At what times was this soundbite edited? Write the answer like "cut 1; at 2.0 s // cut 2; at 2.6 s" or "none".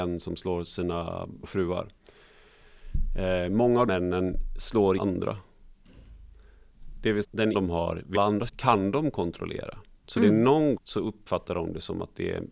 cut 1; at 1.4 s // cut 2; at 3.9 s // cut 3; at 5.0 s // cut 4; at 7.2 s // cut 5; at 7.5 s // cut 6; at 8.1 s // cut 7; at 8.5 s // cut 8; at 10.8 s